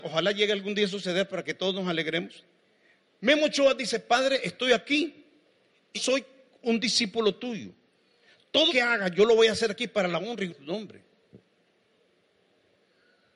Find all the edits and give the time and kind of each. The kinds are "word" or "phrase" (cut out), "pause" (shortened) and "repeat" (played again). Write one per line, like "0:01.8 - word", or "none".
0:02.6 - pause
0:05.9 - word
0:08.7 - word
0:10.5 - word